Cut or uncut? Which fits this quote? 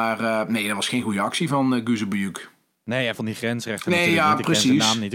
cut